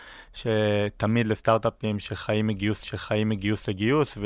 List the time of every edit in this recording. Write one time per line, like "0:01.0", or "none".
0:02.8

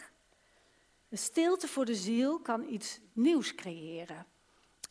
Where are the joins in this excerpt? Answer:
none

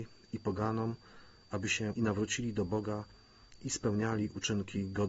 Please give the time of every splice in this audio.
0:01.9

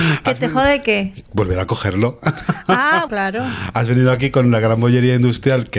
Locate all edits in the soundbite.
0:03.1

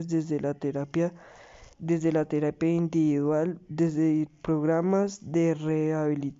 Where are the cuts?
0:01.7

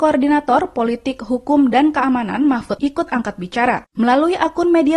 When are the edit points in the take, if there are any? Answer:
0:02.8

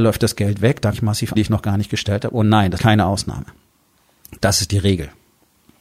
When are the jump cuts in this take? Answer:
0:00.9
0:01.3
0:02.8

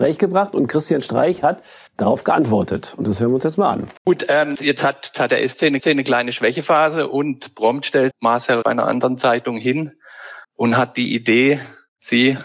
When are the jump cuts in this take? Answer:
0:01.9
0:04.0
0:04.6
0:05.1
0:05.8
0:08.1
0:08.6
0:10.4

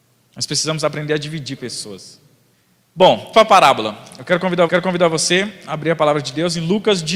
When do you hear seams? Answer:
0:01.6
0:03.3
0:04.7

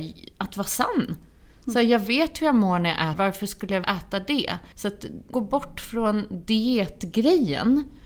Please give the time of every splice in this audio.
0:03.1
0:03.8
0:04.7
0:05.3

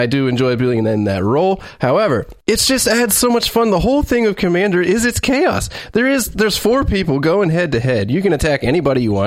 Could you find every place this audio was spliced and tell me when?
0:02.4

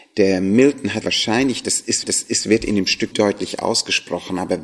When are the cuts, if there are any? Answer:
0:01.0
0:02.0
0:03.1

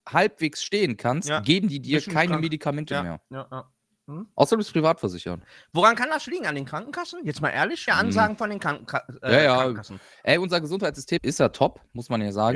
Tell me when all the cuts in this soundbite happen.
0:07.9
0:11.2

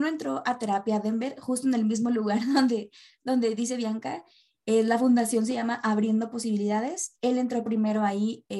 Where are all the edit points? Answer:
none

